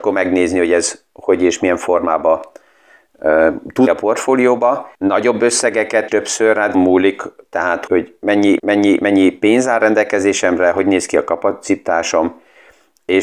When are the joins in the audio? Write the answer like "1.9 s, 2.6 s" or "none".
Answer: 3.9 s, 4.9 s, 6.1 s, 6.7 s, 7.9 s, 8.6 s